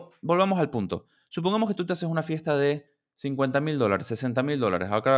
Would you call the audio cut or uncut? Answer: uncut